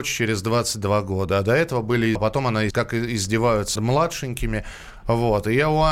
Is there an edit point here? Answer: yes; 3 cuts; at 2.1 s, 2.7 s, 3.8 s

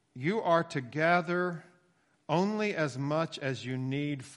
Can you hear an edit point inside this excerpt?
no; 0 cuts

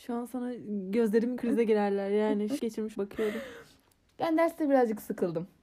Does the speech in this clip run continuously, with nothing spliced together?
no; 3 cuts; at 1.4 s, 2.6 s, 2.9 s

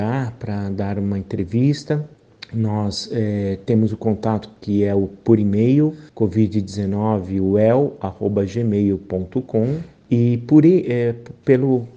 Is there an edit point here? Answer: yes; 1 cut; at 6.1 s

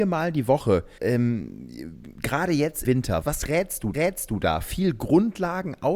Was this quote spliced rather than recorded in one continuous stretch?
yes; 4 cuts; at 1.0 s, 2.8 s, 3.2 s, 3.9 s

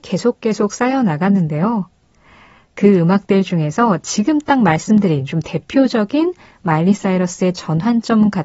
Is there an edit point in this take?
no; 0 cuts

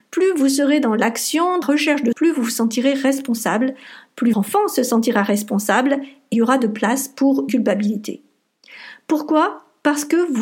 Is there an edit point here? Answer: yes; 5 cuts; at 1.6 s, 2.1 s, 4.3 s, 6.3 s, 7.5 s

